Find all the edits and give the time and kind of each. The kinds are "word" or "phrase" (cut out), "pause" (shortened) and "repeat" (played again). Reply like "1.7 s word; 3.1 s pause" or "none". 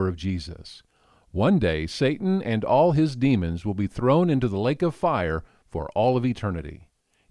none